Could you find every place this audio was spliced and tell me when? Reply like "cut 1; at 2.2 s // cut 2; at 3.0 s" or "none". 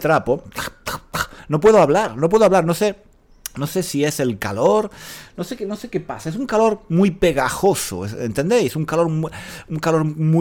none